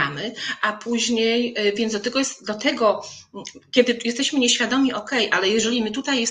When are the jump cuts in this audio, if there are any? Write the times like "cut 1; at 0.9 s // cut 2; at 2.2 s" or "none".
none

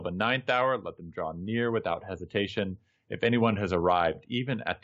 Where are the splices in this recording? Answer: none

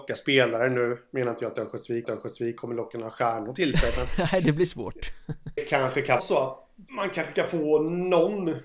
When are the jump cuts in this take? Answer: cut 1; at 2.0 s // cut 2; at 5.6 s // cut 3; at 6.2 s // cut 4; at 6.9 s

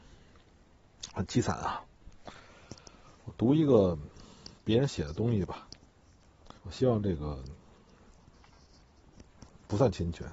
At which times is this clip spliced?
cut 1; at 3.1 s // cut 2; at 4.6 s // cut 3; at 6.6 s

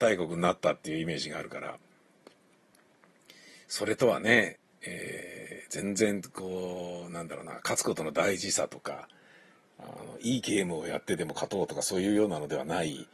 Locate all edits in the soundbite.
none

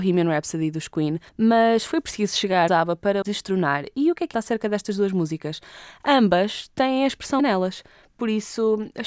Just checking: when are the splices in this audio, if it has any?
cut 1; at 1.3 s // cut 2; at 2.7 s // cut 3; at 3.2 s // cut 4; at 4.3 s // cut 5; at 7.4 s

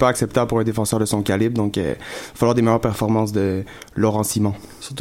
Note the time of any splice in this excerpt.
none

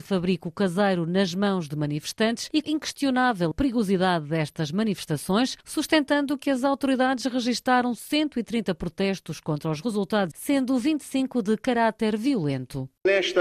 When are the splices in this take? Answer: cut 1; at 2.6 s // cut 2; at 3.5 s // cut 3; at 10.3 s

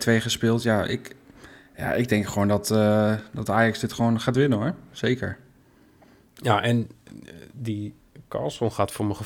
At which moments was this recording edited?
none

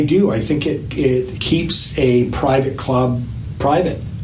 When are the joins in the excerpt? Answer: cut 1; at 1.4 s

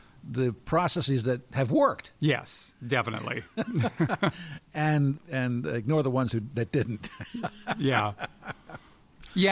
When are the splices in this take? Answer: cut 1; at 5.2 s

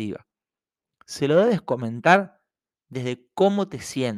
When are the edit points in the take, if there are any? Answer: none

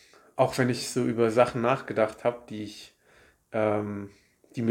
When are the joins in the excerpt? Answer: none

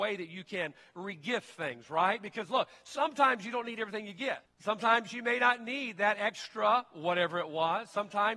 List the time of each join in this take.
cut 1; at 4.4 s

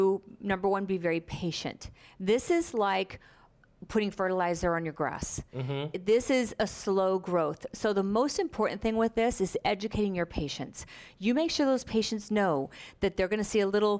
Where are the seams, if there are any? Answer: none

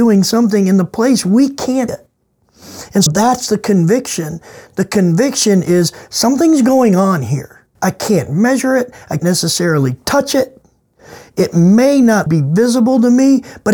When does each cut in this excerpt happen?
cut 1; at 1.9 s // cut 2; at 3.1 s // cut 3; at 7.8 s // cut 4; at 9.2 s // cut 5; at 12.3 s

